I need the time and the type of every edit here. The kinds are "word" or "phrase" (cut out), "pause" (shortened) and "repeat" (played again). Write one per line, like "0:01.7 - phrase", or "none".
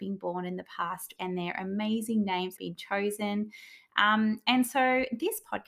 0:01.2 - word
0:02.6 - phrase